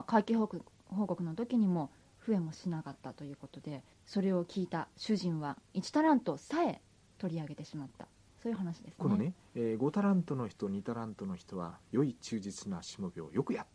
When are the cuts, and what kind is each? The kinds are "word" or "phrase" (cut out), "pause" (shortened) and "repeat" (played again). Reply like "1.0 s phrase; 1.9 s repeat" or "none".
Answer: 3.9 s pause

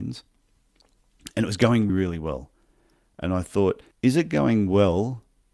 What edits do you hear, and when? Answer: 1.9 s word; 3.9 s pause

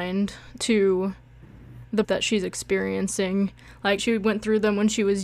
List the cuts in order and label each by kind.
2.0 s word; 4.0 s word

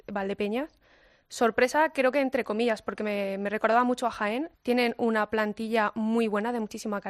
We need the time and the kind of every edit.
4.5 s pause

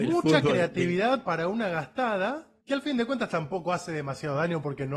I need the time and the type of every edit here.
2.6 s pause

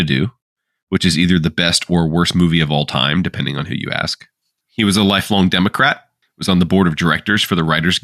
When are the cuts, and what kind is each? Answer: none

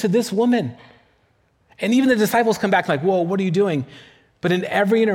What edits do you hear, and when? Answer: none

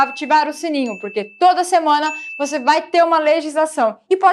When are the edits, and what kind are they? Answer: none

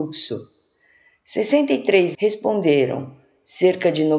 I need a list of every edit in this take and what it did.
2.1 s word

